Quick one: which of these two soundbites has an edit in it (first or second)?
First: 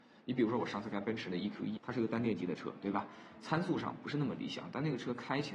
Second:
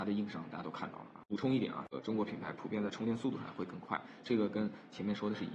first